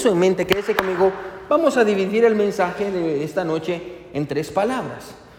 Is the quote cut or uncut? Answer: uncut